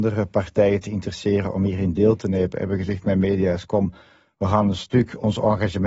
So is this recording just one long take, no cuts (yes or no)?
yes